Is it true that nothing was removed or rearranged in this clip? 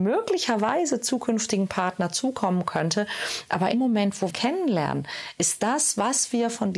no; 2 cuts; at 3.7 s, 4.3 s

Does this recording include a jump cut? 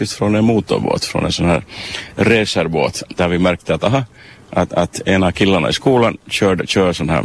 no; 0 cuts

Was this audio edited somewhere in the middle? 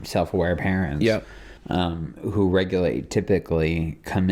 yes; 1 cut; at 1.6 s

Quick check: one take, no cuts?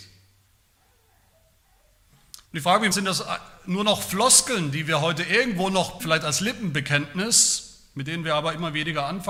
no; 3 cuts; at 2.4 s, 2.9 s, 6.0 s

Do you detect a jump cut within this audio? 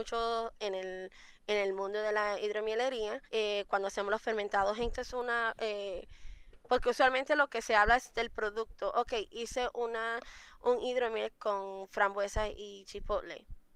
yes; 3 cuts; at 3.3 s, 4.9 s, 11.3 s

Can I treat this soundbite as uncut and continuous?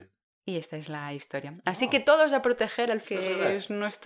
no; 1 cut; at 3.0 s

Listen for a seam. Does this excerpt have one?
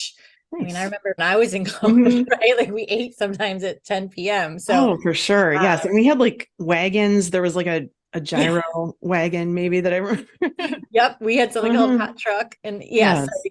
yes; 1 cut; at 1.2 s

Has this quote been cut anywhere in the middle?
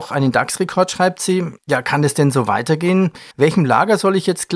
yes; 2 cuts; at 1.6 s, 3.3 s

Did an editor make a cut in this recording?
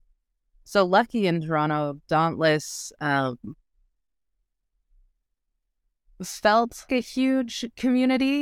yes; 1 cut; at 6.9 s

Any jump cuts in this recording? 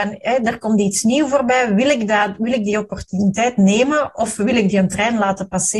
no; 0 cuts

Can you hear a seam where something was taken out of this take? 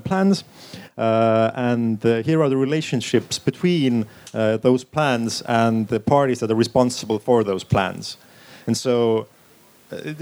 no; 0 cuts

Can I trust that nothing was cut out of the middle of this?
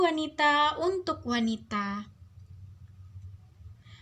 yes; 0 cuts

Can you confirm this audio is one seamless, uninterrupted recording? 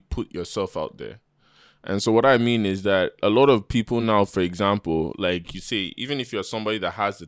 yes; 0 cuts

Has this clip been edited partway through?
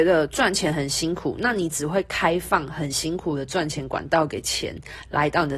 no; 0 cuts

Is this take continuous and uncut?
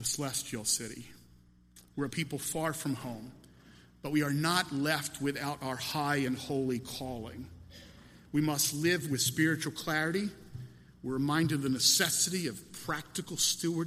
yes; 0 cuts

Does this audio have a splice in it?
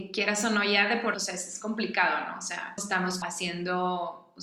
yes; 3 cuts; at 1.1 s, 2.8 s, 3.2 s

